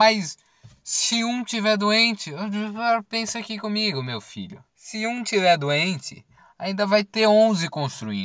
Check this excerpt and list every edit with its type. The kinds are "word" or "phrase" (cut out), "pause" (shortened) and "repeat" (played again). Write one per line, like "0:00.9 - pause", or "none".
0:04.7 - pause